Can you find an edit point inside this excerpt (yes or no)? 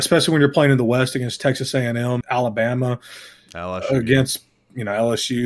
yes